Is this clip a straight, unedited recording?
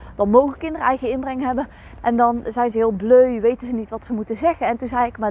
yes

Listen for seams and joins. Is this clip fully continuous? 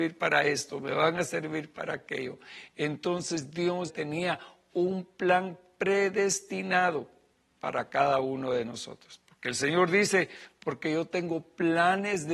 no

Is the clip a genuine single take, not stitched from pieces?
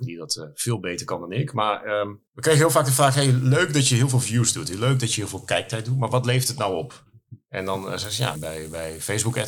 no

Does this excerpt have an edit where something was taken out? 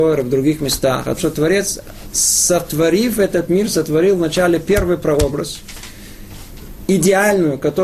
yes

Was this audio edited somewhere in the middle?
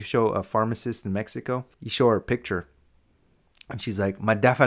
yes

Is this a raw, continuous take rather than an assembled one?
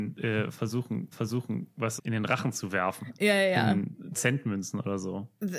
no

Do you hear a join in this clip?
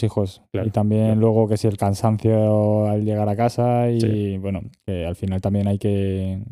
no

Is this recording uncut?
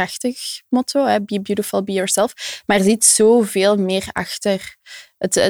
yes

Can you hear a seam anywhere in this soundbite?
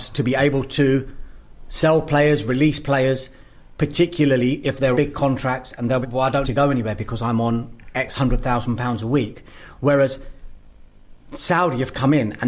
yes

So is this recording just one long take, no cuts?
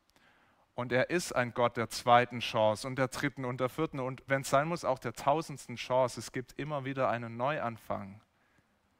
no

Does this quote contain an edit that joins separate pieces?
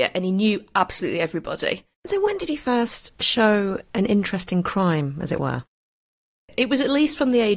yes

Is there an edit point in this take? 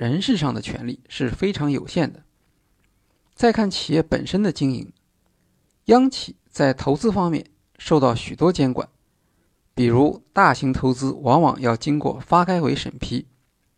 no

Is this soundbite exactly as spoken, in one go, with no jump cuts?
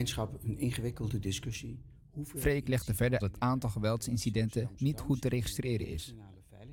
no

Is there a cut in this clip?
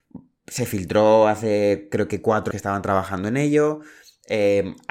yes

